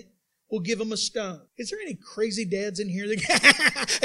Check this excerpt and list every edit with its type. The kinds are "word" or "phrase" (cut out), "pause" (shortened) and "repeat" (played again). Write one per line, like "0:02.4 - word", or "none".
0:01.5 - pause